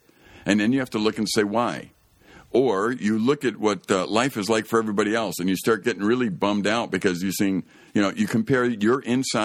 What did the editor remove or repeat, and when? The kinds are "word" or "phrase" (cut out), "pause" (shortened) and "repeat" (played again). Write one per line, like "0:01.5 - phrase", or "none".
none